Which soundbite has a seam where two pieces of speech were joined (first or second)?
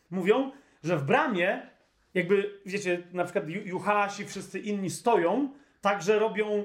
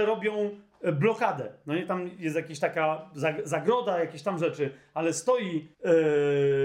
second